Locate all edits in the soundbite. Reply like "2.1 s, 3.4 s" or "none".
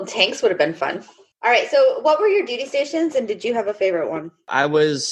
none